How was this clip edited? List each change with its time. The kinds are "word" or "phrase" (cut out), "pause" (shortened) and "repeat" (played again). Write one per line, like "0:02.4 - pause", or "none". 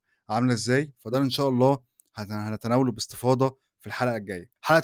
none